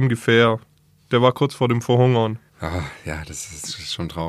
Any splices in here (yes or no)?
yes